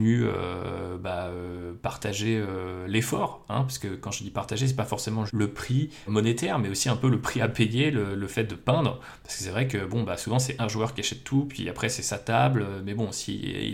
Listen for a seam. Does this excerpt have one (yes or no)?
yes